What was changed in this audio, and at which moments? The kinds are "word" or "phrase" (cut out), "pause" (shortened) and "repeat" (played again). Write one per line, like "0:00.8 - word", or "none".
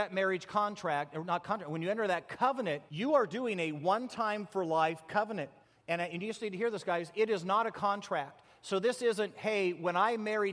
0:02.9 - pause
0:05.6 - pause